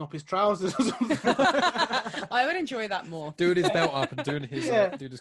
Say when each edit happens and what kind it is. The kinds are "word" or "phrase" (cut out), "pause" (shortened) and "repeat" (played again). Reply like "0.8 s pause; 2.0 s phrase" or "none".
none